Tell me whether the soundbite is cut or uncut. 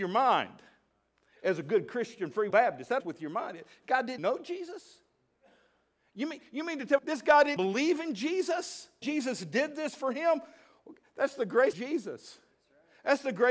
cut